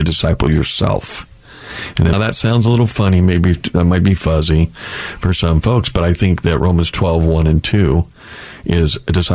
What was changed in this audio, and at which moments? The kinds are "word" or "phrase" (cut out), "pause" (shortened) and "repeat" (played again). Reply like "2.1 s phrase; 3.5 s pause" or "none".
2.1 s word